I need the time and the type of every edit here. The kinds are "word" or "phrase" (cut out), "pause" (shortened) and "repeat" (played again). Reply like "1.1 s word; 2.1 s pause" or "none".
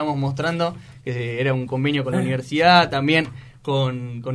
none